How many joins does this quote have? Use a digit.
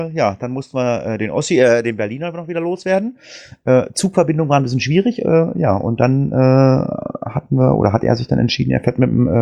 0